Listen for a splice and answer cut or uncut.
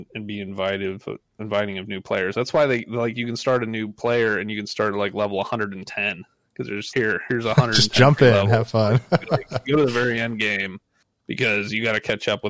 cut